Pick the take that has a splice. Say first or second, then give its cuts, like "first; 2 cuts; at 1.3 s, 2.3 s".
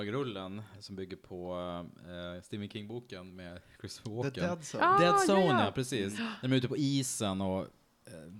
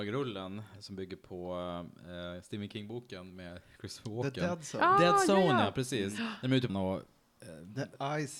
second; 1 cut; at 6.7 s